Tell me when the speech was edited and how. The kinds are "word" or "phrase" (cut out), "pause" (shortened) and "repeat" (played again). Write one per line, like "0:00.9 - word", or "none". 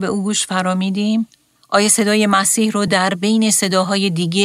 none